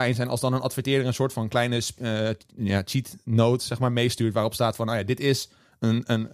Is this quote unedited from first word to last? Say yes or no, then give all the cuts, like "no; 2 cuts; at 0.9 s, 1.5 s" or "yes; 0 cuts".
yes; 0 cuts